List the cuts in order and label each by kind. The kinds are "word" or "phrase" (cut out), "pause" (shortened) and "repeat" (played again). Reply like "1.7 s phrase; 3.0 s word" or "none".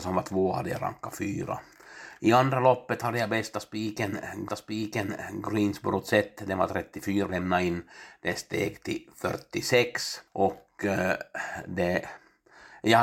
4.5 s repeat; 7.3 s phrase; 10.3 s pause